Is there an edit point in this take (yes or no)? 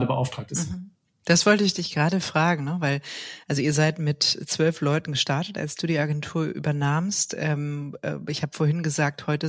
no